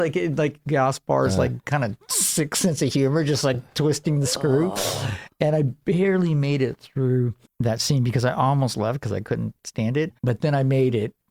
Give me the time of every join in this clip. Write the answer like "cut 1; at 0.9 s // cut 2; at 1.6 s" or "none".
cut 1; at 7.4 s // cut 2; at 9.6 s // cut 3; at 10.2 s